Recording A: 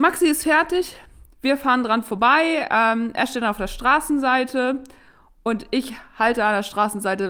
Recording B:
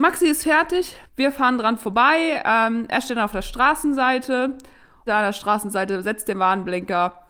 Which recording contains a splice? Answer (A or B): B